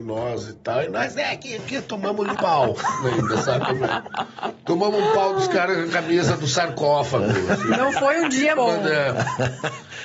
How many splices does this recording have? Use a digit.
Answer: 3